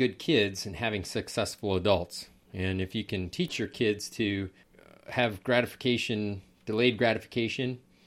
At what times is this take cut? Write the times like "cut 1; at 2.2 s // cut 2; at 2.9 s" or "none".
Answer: none

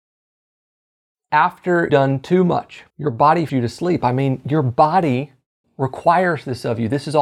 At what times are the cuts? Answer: cut 1; at 1.9 s // cut 2; at 2.9 s // cut 3; at 3.5 s

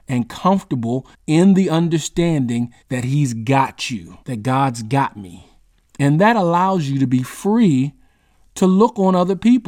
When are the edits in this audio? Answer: cut 1; at 1.1 s // cut 2; at 2.8 s // cut 3; at 4.2 s

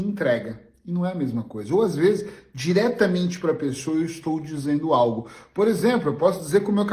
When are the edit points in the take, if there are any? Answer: none

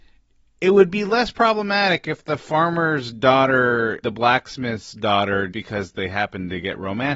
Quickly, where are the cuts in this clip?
cut 1; at 4.0 s // cut 2; at 5.5 s

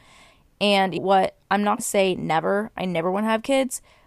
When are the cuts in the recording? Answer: cut 1; at 1.0 s // cut 2; at 1.8 s

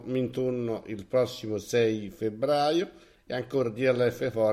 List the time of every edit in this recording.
none

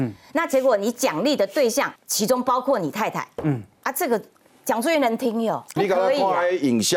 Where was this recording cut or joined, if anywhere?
cut 1; at 2.0 s // cut 2; at 5.8 s

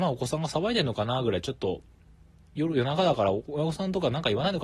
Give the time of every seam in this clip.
none

